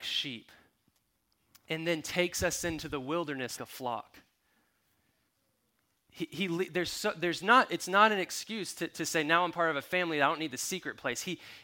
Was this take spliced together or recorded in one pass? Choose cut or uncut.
cut